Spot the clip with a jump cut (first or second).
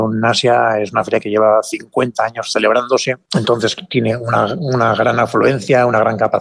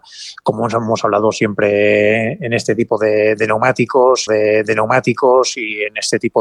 second